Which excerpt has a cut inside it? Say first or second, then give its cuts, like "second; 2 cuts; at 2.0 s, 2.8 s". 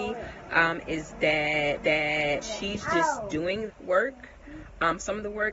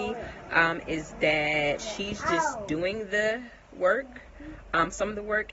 first; 2 cuts; at 1.8 s, 3.7 s